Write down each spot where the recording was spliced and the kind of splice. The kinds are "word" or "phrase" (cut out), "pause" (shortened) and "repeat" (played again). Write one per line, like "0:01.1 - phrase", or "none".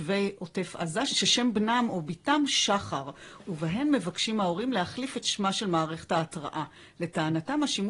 none